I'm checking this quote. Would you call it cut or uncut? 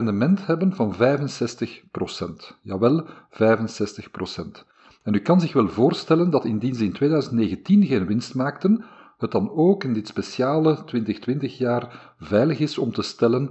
uncut